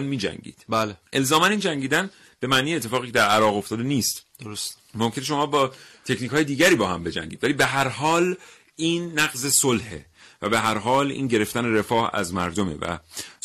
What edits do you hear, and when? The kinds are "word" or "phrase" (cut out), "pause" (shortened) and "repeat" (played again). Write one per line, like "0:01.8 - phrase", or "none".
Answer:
0:01.1 - pause